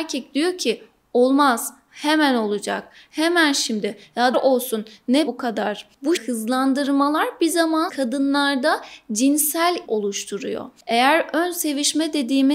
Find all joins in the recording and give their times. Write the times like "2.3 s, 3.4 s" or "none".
4.3 s, 5.3 s, 6.2 s, 7.9 s, 9.8 s

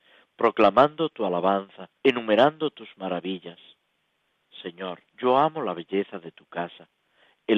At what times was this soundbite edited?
2.0 s, 5.1 s

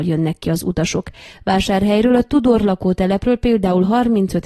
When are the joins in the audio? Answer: none

